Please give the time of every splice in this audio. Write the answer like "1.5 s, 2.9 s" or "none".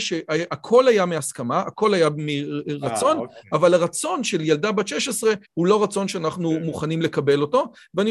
5.4 s